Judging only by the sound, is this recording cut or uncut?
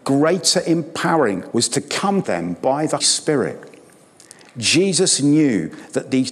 cut